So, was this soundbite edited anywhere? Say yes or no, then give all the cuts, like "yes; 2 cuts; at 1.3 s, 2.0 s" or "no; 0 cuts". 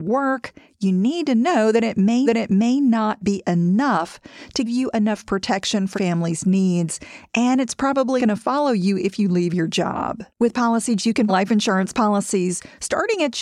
yes; 7 cuts; at 2.2 s, 4.6 s, 5.9 s, 8.2 s, 10.3 s, 11.0 s, 11.3 s